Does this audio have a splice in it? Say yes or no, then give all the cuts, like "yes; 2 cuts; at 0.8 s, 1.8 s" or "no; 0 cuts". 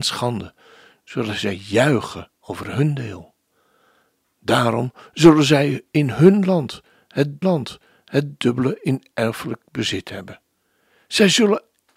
yes; 2 cuts; at 2.3 s, 7.4 s